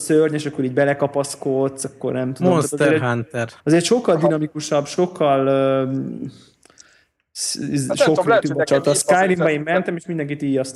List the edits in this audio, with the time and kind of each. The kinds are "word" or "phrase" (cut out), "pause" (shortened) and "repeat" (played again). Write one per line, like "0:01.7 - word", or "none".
0:03.6 - pause